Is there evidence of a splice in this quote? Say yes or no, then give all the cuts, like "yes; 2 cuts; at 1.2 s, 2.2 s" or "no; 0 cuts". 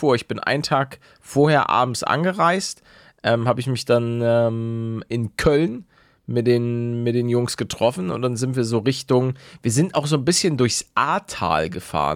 no; 0 cuts